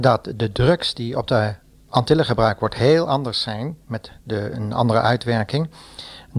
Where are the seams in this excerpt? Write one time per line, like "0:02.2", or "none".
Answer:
none

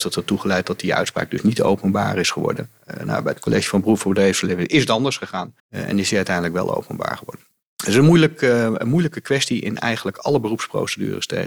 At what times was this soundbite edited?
0:05.6
0:07.6

